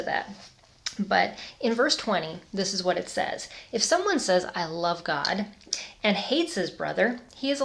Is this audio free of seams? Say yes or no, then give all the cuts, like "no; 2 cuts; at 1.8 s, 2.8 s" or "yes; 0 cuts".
yes; 0 cuts